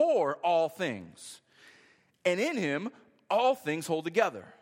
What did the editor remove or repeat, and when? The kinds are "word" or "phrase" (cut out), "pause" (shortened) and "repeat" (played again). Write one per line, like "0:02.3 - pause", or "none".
none

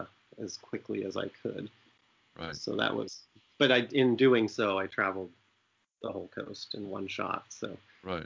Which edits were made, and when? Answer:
none

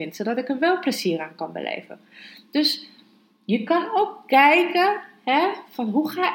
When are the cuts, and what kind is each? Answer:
none

